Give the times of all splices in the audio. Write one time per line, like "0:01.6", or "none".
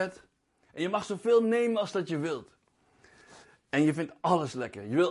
none